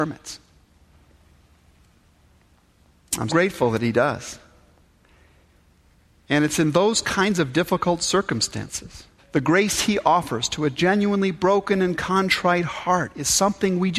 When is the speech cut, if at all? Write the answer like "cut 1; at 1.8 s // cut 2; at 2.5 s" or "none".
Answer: cut 1; at 3.3 s // cut 2; at 9.2 s